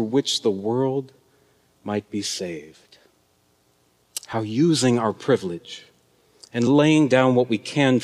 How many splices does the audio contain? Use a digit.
0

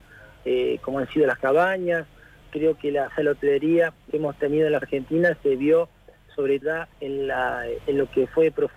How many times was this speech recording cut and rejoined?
5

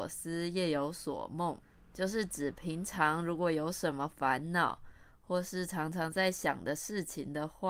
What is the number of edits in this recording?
1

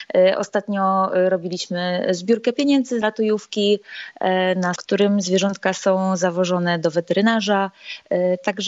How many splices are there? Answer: 2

